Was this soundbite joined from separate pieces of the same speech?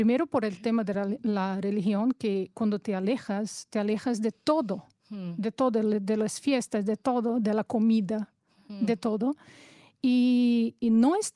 no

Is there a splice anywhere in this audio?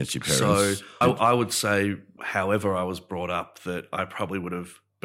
yes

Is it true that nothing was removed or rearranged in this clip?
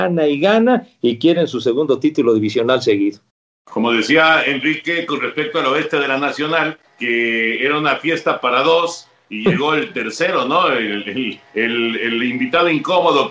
no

